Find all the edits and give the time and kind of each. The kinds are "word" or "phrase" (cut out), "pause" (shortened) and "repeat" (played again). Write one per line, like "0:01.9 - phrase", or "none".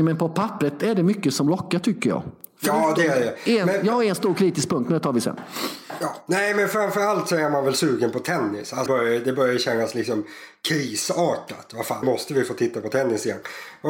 0:08.9 - word
0:12.0 - word